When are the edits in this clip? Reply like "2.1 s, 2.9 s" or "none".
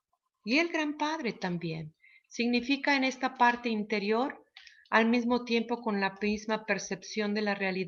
none